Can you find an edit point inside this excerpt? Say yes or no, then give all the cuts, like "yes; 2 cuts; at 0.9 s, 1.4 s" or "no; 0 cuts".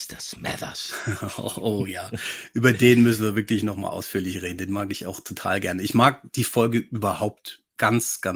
no; 0 cuts